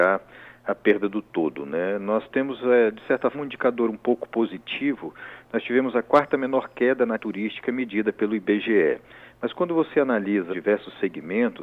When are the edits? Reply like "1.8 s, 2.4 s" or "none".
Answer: 3.3 s, 7.2 s, 10.5 s